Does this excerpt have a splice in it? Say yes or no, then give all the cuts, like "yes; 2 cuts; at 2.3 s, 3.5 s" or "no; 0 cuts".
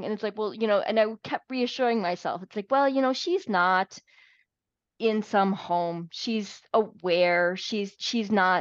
no; 0 cuts